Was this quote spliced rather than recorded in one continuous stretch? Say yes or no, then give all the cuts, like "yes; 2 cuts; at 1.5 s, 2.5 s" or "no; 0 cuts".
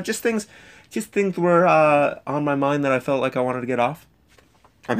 no; 0 cuts